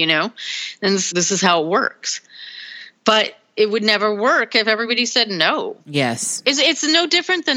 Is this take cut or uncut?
cut